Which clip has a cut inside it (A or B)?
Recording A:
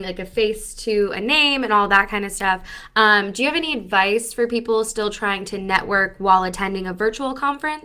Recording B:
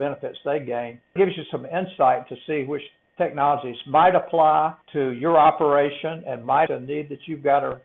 B